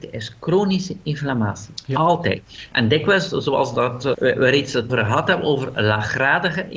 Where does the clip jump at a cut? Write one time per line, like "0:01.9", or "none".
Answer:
0:04.1
0:04.9